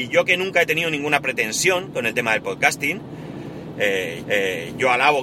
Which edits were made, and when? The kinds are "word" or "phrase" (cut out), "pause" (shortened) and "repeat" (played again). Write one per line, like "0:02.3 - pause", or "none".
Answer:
0:04.2 - repeat